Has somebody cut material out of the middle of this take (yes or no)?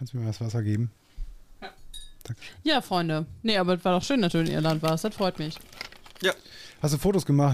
no